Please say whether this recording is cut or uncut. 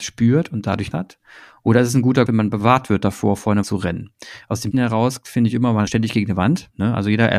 cut